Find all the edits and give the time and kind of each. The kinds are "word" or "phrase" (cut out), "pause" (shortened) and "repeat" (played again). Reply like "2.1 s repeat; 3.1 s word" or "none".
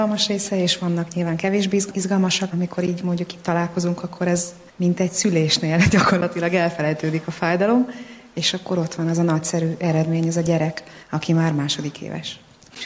2.5 s word; 11.0 s pause